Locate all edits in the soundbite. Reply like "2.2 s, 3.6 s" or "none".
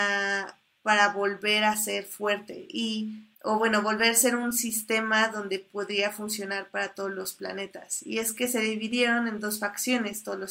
3.3 s